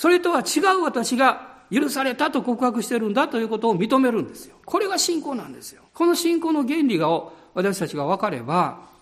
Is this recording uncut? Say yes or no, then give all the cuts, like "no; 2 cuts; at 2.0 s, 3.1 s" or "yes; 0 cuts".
no; 2 cuts; at 4.6 s, 5.9 s